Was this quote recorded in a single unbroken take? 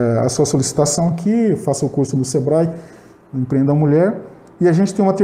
yes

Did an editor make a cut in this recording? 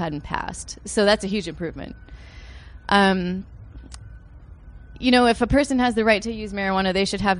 no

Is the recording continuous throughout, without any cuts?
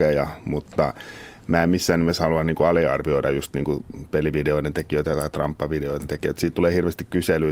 yes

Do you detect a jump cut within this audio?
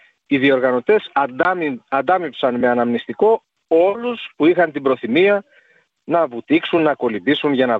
no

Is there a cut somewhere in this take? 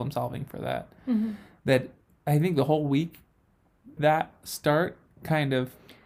yes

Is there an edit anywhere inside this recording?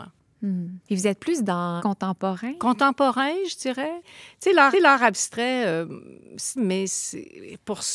yes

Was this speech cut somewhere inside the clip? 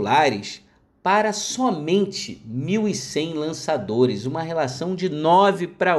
no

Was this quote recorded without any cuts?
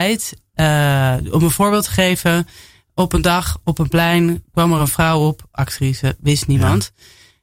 yes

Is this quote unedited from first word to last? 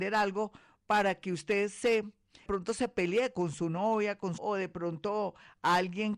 no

